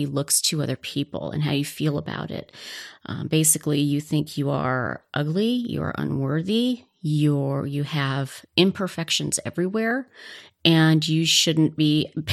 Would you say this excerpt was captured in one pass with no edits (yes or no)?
yes